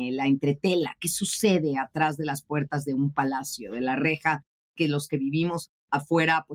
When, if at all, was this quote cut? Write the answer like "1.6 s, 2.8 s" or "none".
none